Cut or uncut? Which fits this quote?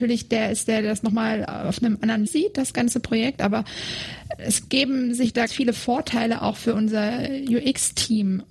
cut